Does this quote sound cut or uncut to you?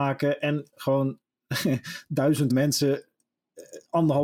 cut